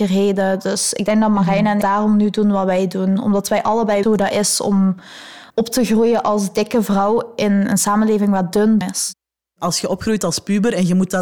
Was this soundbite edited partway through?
yes; 4 cuts; at 1.8 s, 4.0 s, 5.5 s, 8.8 s

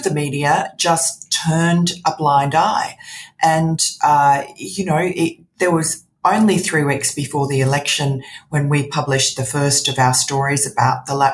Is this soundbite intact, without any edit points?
yes; 0 cuts

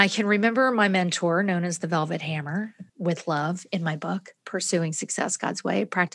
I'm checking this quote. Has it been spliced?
yes; 1 cut; at 2.9 s

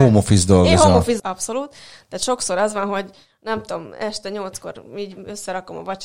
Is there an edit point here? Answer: yes; 1 cut; at 1.2 s

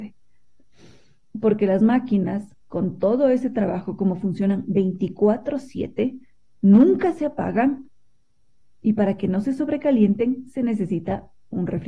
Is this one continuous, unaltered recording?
yes; 0 cuts

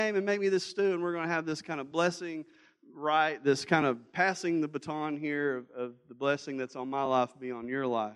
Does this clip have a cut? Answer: no; 0 cuts

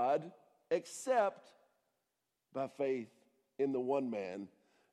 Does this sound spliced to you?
no; 0 cuts

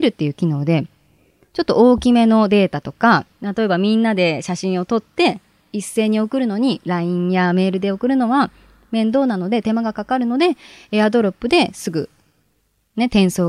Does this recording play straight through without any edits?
no; 1 cut; at 3.3 s

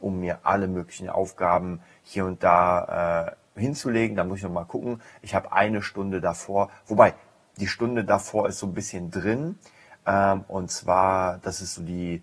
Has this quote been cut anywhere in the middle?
no; 0 cuts

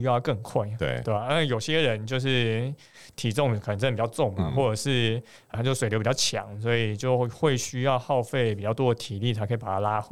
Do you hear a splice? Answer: no; 0 cuts

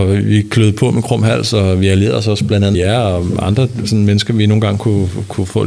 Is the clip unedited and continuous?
no; 1 cut; at 2.7 s

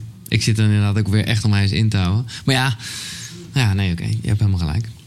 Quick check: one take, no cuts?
yes; 0 cuts

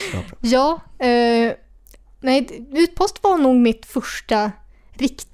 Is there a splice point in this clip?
no; 0 cuts

